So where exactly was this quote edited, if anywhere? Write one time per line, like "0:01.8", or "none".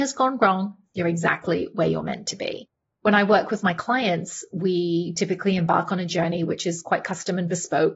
none